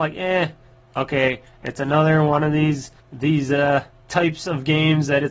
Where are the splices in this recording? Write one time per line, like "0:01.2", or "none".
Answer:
0:03.0
0:03.9